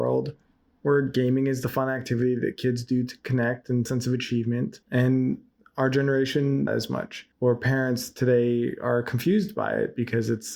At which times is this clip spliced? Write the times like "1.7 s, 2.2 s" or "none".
3.9 s, 4.8 s, 6.7 s, 7.3 s